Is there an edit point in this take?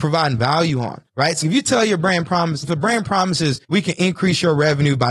yes; 4 cuts; at 1.1 s, 1.4 s, 2.6 s, 3.6 s

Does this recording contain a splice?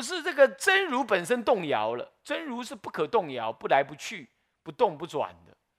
no; 0 cuts

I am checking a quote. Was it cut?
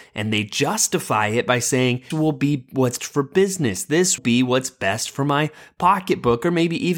yes; 3 cuts; at 2.1 s, 3.0 s, 4.2 s

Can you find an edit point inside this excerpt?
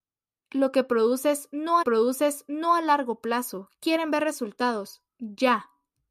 yes; 1 cut; at 1.8 s

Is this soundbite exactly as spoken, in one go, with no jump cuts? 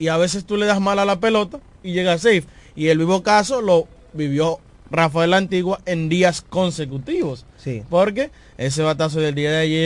yes; 0 cuts

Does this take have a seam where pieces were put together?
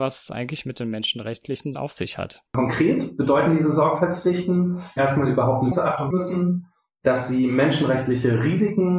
yes; 5 cuts; at 1.7 s, 2.5 s, 5.0 s, 5.7 s, 6.1 s

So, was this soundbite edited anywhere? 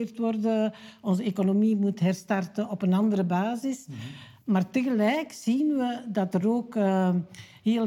no; 0 cuts

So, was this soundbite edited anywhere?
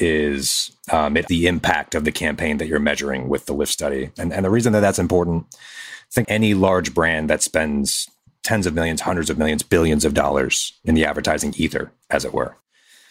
yes; 2 cuts; at 1.3 s, 6.2 s

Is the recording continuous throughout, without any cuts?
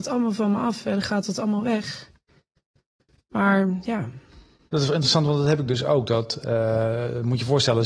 yes; 0 cuts

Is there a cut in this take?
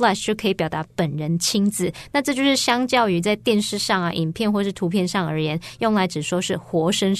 no; 0 cuts

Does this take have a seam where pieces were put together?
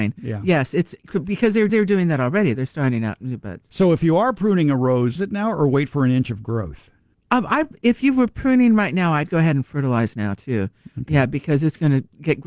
yes; 3 cuts; at 1.7 s, 5.2 s, 7.1 s

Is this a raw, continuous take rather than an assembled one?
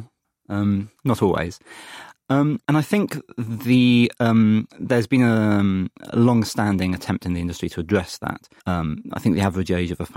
no; 2 cuts; at 2.6 s, 8.6 s

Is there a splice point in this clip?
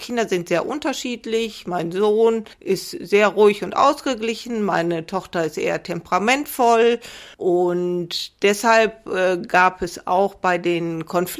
yes; 2 cuts; at 2.5 s, 7.3 s

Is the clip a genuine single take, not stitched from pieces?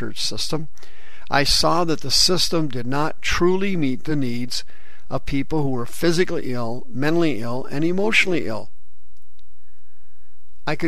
yes; 0 cuts

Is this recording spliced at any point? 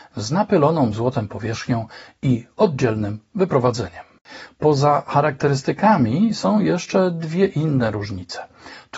no; 0 cuts

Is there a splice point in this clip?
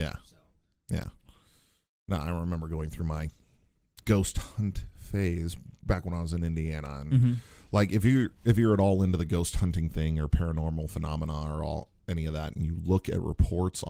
no; 0 cuts

